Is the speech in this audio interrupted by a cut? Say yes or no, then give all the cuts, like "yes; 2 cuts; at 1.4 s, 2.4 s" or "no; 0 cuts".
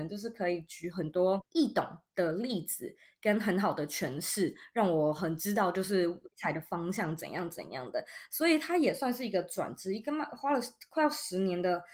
yes; 2 cuts; at 1.5 s, 6.3 s